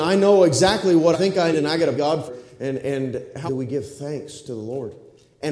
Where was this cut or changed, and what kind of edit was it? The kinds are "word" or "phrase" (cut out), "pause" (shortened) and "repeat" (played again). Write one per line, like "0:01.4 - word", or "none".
0:01.1 - word
0:01.5 - word
0:01.9 - word
0:02.3 - word
0:03.5 - word

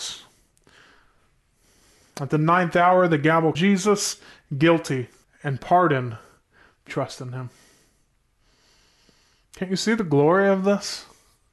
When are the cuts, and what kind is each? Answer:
0:03.5 - phrase
0:05.2 - pause
0:06.9 - phrase

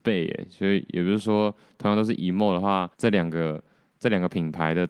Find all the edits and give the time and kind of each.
0:02.9 - pause

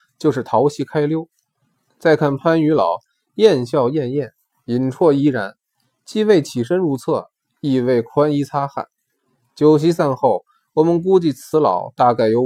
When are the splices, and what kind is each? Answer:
none

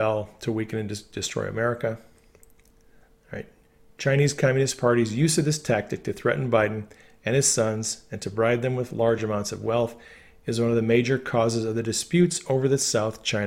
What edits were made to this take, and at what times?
none

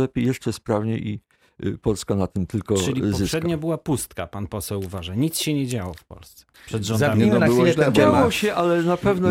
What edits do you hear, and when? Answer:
0:06.5 - pause

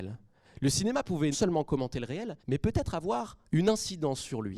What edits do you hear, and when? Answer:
0:01.3 - word
0:02.4 - pause
0:03.5 - pause

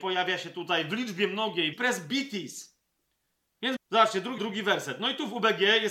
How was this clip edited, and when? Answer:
0:01.7 - phrase
0:03.8 - word
0:04.4 - word

